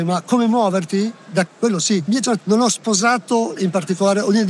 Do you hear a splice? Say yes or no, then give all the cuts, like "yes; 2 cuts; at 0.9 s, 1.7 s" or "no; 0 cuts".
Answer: yes; 4 cuts; at 1.5 s, 2.1 s, 2.4 s, 3.6 s